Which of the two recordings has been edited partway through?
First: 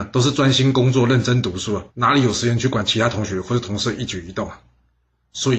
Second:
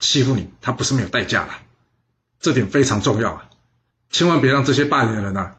first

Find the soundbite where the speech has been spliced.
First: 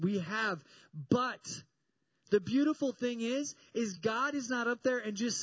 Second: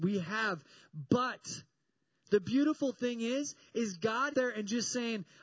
second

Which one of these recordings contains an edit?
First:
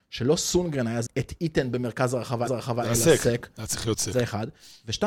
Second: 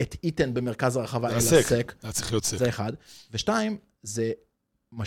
first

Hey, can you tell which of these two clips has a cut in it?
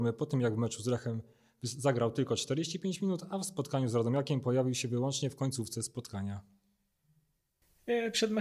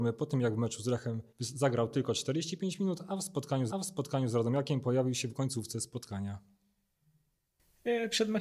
second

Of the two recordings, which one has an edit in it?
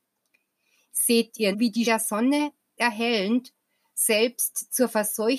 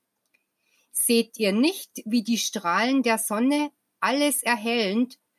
first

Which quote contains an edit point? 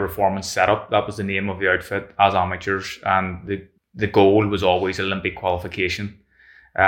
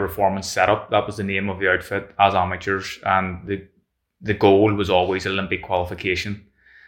first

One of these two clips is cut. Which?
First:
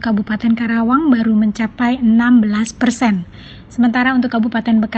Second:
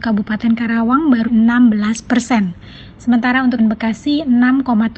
second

